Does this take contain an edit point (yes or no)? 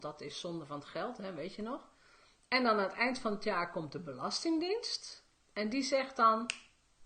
no